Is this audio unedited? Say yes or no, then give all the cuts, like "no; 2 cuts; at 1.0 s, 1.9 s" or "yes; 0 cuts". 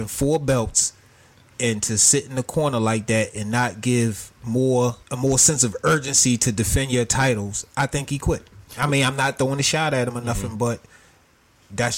no; 2 cuts; at 5.0 s, 8.7 s